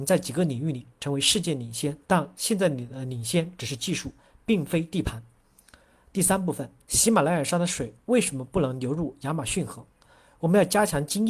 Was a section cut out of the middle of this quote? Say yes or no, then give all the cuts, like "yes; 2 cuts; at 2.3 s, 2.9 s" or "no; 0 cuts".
yes; 2 cuts; at 2.0 s, 6.8 s